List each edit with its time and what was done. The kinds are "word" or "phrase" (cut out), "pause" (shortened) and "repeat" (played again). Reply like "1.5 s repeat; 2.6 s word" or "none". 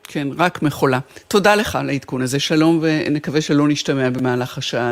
none